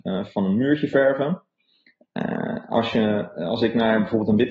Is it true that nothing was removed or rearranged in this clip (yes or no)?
yes